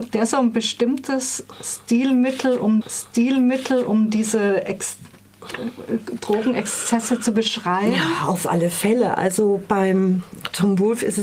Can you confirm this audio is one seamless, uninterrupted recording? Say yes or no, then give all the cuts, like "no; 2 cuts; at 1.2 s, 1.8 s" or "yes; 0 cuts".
no; 1 cut; at 2.8 s